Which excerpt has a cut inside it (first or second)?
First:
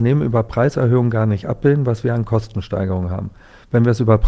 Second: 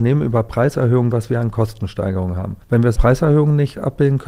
second